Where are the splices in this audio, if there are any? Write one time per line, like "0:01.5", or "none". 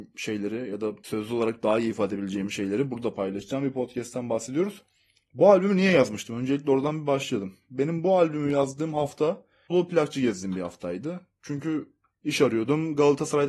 0:09.7